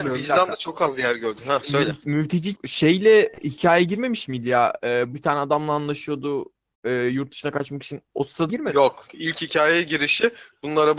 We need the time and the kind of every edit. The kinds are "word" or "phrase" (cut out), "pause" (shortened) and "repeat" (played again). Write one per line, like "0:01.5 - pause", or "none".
0:02.5 - word
0:05.1 - word
0:08.5 - word
0:09.1 - word